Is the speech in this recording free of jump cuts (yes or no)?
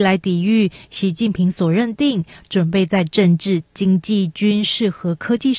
yes